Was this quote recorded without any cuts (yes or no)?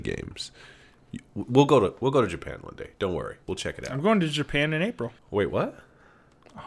no